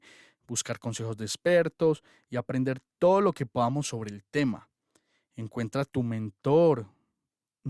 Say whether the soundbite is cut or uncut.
uncut